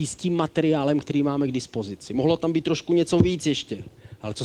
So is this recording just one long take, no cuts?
yes; 0 cuts

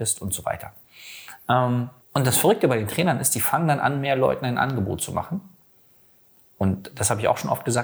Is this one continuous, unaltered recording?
no; 1 cut; at 2.0 s

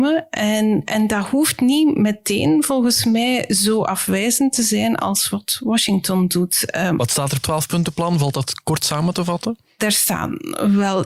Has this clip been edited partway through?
yes; 1 cut; at 7.4 s

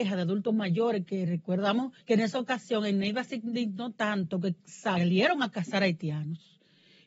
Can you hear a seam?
yes; 1 cut; at 2.0 s

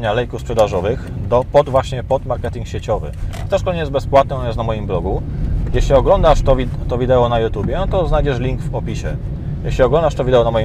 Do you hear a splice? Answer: no; 0 cuts

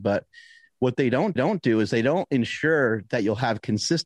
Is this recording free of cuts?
no; 1 cut; at 1.4 s

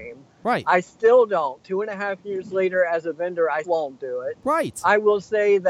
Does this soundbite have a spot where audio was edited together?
yes; 1 cut; at 3.6 s

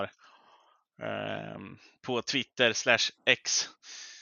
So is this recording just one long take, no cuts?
yes; 0 cuts

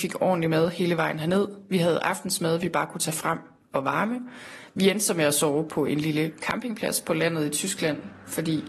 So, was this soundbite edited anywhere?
no; 0 cuts

